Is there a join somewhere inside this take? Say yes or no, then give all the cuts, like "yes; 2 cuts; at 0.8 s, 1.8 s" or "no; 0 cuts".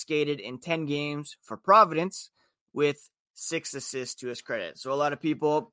no; 0 cuts